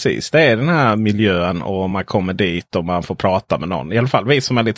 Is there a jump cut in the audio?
no; 0 cuts

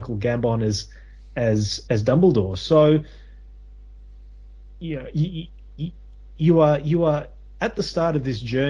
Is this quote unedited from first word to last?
no; 1 cut; at 1.9 s

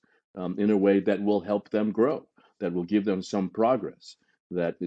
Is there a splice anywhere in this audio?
no; 0 cuts

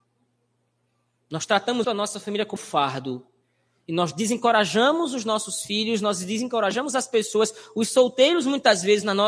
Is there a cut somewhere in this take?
yes; 2 cuts; at 1.8 s, 2.6 s

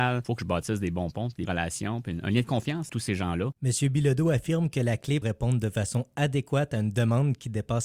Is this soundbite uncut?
no; 4 cuts; at 1.5 s, 2.9 s, 3.6 s, 5.2 s

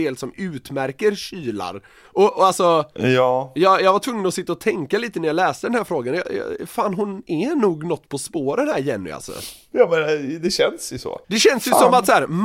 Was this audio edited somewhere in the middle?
yes; 1 cut; at 11.2 s

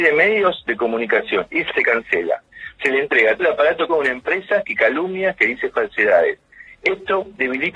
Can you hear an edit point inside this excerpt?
yes; 3 cuts; at 1.7 s, 3.4 s, 3.9 s

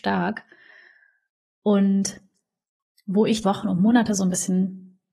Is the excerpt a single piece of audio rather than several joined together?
no; 1 cut; at 3.4 s

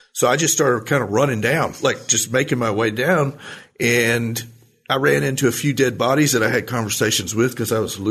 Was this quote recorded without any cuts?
yes; 0 cuts

